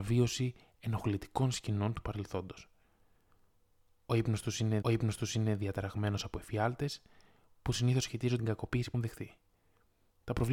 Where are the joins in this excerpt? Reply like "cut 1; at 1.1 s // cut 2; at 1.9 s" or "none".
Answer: cut 1; at 4.8 s // cut 2; at 8.4 s // cut 3; at 8.9 s